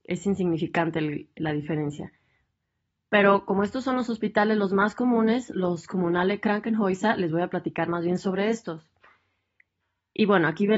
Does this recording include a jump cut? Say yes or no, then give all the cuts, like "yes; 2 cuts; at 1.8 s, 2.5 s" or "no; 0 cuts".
no; 0 cuts